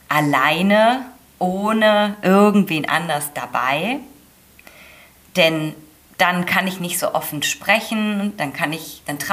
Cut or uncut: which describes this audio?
uncut